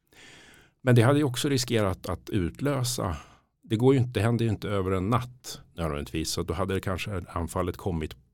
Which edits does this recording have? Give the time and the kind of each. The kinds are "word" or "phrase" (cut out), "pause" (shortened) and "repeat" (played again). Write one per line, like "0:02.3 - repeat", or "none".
none